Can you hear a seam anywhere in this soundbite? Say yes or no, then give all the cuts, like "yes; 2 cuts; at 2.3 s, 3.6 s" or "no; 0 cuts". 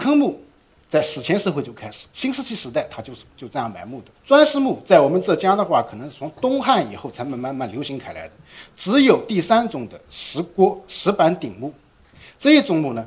yes; 3 cuts; at 2.1 s, 3.3 s, 4.2 s